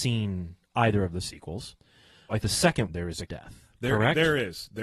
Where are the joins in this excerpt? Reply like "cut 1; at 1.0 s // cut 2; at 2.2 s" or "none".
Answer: cut 1; at 2.4 s // cut 2; at 2.9 s // cut 3; at 3.3 s